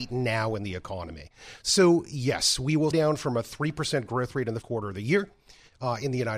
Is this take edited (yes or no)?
yes